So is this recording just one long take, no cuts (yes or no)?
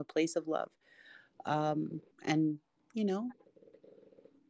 no